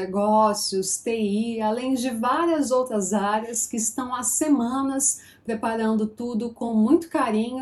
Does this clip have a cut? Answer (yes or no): no